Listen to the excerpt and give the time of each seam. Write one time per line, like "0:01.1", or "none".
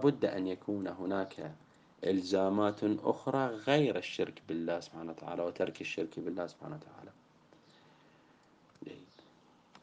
none